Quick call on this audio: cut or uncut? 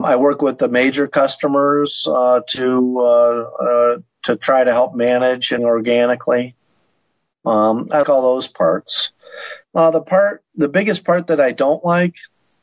cut